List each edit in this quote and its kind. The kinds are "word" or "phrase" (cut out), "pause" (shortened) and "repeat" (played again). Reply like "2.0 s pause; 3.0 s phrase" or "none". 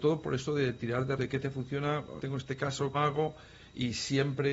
1.2 s word; 2.2 s word; 2.9 s word